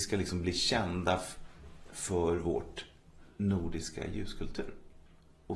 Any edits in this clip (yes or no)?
no